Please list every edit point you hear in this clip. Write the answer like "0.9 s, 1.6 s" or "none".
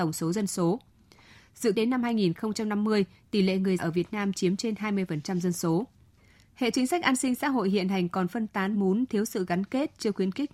1.7 s, 3.8 s, 6.7 s, 8.7 s